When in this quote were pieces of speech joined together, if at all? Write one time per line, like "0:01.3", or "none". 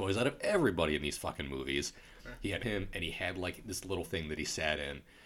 0:02.6
0:04.0